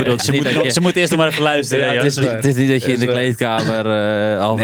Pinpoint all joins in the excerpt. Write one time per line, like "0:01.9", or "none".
none